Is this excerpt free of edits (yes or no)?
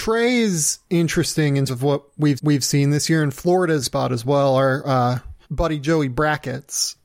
no